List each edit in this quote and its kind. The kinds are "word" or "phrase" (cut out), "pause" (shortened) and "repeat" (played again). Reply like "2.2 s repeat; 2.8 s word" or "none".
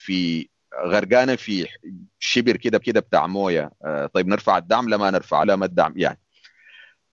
2.8 s repeat; 5.4 s phrase